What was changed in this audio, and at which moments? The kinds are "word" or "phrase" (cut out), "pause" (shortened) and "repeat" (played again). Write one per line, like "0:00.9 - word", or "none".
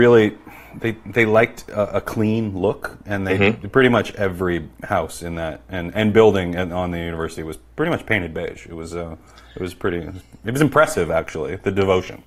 none